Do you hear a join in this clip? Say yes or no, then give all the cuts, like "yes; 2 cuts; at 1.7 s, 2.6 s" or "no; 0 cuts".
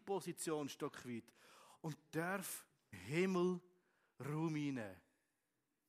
yes; 1 cut; at 2.9 s